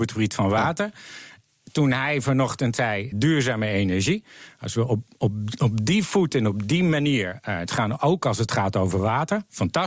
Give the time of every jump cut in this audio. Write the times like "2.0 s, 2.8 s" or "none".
3.1 s, 7.7 s